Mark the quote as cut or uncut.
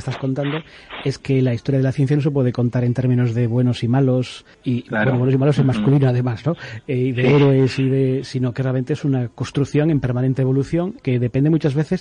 cut